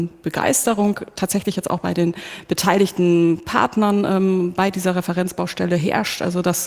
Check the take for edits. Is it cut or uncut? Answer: uncut